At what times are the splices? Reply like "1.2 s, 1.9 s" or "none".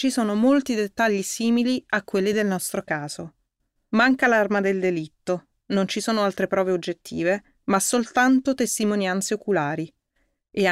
none